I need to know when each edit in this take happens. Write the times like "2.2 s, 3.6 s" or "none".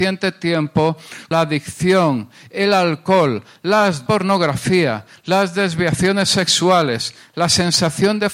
1.3 s, 4.1 s